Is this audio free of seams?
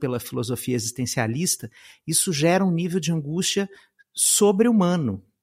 yes; 0 cuts

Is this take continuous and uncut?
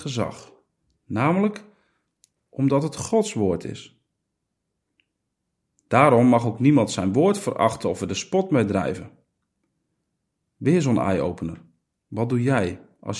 yes; 0 cuts

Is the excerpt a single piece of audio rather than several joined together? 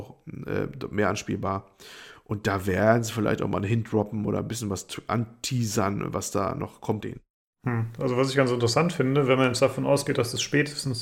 no; 1 cut; at 7.0 s

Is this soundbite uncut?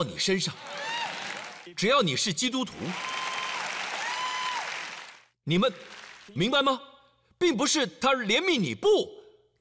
yes; 0 cuts

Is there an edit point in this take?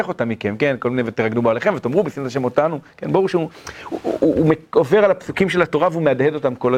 no; 0 cuts

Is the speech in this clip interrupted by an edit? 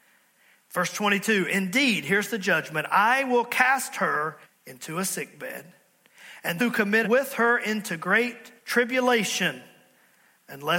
yes; 4 cuts; at 4.4 s, 6.6 s, 7.0 s, 8.6 s

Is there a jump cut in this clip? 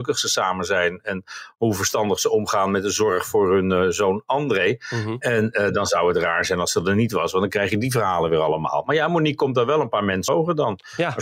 yes; 1 cut; at 10.3 s

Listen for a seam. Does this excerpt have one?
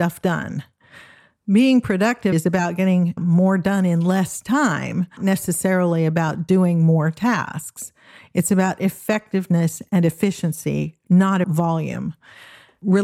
yes; 4 cuts; at 2.3 s, 3.2 s, 5.2 s, 11.4 s

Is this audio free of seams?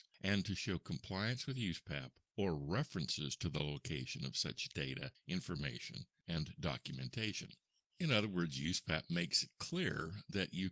yes; 0 cuts

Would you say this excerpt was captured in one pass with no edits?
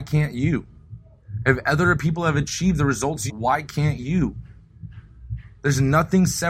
no; 1 cut; at 3.3 s

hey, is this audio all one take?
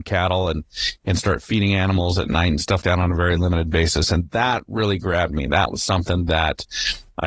no; 1 cut; at 2.8 s

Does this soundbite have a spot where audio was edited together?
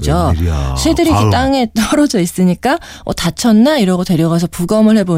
no; 0 cuts

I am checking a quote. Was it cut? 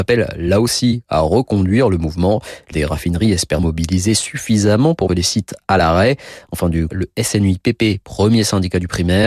yes; 4 cuts; at 2.7 s, 3.6 s, 5.1 s, 6.9 s

